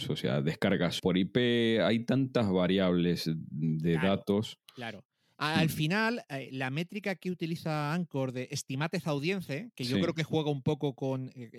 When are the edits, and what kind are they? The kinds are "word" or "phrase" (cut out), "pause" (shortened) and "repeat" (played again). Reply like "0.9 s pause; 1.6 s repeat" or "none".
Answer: 1.0 s phrase; 4.6 s pause